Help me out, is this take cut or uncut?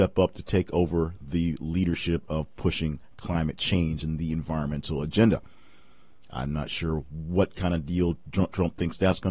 uncut